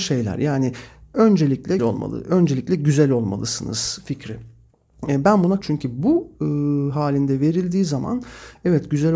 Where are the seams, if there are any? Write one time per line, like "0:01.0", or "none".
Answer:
0:01.8
0:05.6
0:06.3

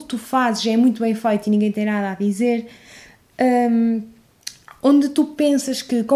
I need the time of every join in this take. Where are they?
none

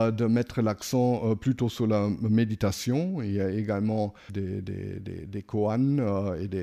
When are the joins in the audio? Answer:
0:04.3

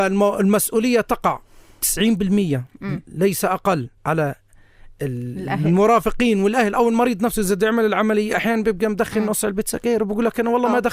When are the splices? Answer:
0:04.0

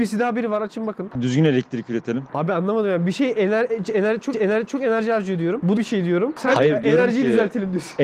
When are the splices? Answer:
0:01.2
0:04.3
0:05.8

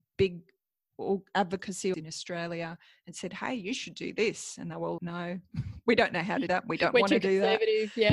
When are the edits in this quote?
0:01.9
0:05.0
0:06.5

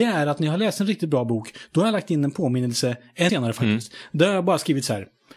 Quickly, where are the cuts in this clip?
0:03.3

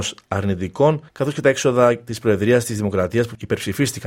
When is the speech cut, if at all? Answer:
0:01.1

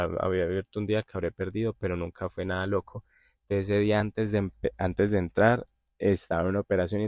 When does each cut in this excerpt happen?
none

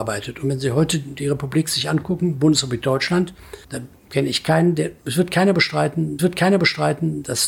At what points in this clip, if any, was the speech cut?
0:03.6
0:06.2

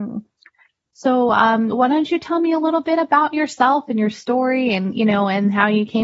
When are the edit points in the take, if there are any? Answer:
none

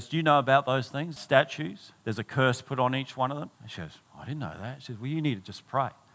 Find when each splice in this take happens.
0:01.2
0:02.0
0:03.5

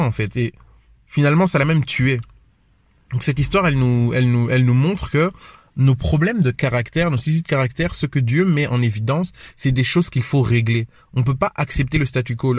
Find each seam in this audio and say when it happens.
none

